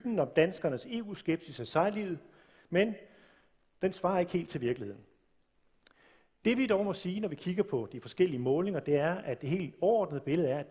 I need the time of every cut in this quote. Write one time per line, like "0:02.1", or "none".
none